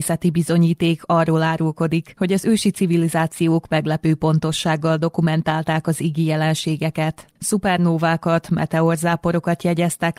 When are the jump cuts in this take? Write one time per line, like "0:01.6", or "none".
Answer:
0:07.3